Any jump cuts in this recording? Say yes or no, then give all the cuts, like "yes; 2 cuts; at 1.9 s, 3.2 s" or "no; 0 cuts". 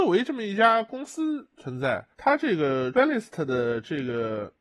yes; 2 cuts; at 2.1 s, 2.9 s